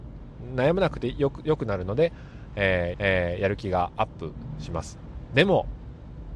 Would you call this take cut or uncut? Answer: cut